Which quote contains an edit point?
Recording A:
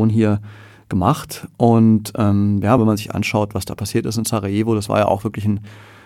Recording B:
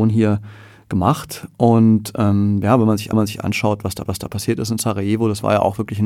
B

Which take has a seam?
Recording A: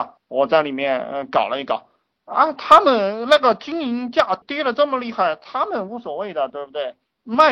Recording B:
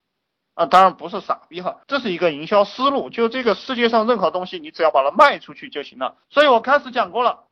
B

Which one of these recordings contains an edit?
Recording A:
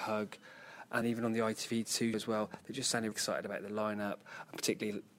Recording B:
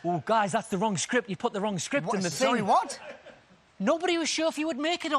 A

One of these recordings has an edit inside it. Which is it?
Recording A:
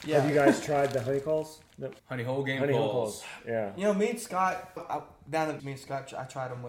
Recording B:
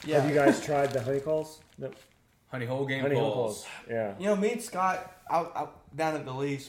A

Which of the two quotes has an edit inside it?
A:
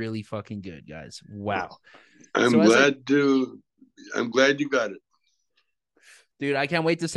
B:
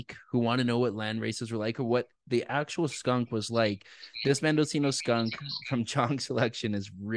B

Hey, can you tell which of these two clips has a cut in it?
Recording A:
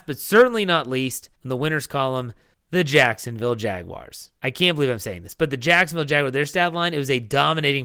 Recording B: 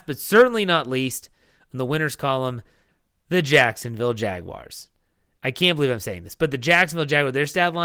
A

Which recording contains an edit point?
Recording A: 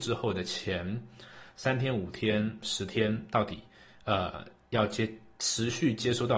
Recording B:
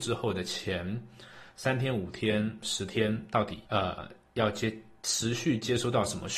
B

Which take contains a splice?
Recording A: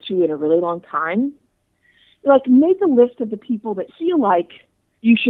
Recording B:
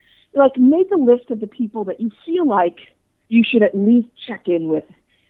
A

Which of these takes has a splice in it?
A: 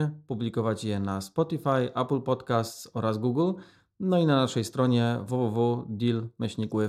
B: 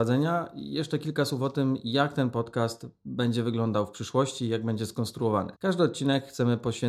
B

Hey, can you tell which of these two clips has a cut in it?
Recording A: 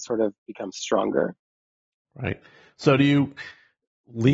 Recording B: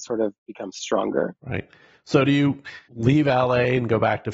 B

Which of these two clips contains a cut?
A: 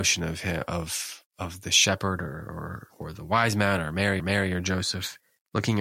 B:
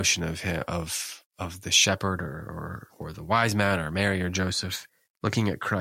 A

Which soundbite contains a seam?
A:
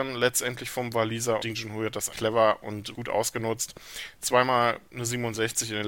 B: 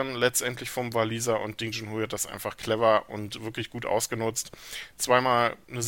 A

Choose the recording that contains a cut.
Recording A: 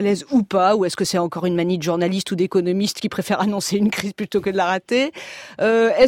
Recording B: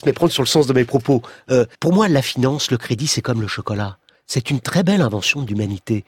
B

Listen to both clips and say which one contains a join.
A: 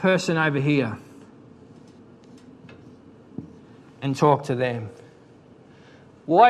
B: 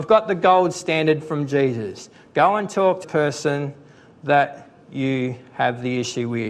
B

